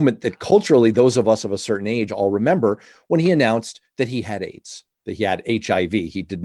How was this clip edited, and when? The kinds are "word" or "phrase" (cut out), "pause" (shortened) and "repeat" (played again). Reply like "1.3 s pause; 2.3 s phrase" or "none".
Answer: none